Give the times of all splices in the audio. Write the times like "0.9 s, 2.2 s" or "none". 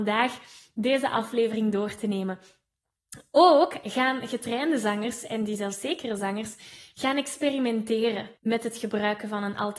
8.4 s